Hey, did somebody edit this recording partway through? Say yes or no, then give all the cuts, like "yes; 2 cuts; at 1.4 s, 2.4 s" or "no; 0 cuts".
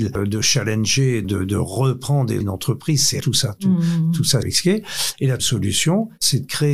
yes; 5 cuts; at 1.2 s, 2.4 s, 3.2 s, 4.4 s, 5.4 s